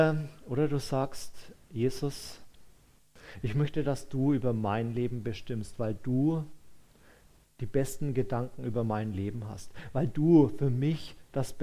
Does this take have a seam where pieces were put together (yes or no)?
no